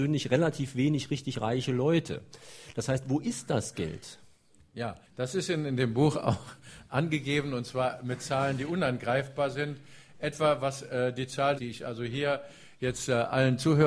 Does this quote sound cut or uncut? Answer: cut